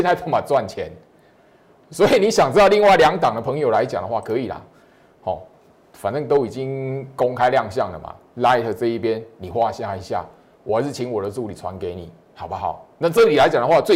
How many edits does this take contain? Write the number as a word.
zero